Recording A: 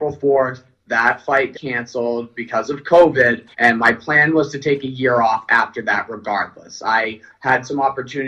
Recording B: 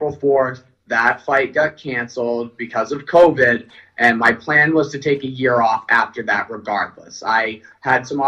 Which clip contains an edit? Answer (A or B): A